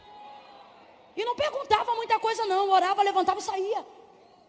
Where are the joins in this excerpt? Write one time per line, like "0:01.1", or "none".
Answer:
none